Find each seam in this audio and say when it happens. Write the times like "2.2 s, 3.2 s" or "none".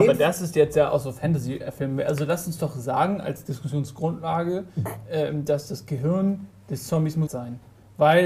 7.3 s